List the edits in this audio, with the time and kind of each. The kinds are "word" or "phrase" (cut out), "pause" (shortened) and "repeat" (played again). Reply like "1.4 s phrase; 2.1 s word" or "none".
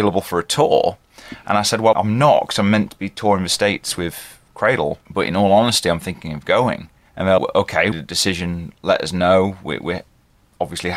1.9 s word; 5.1 s pause; 7.1 s pause; 7.4 s word; 7.9 s phrase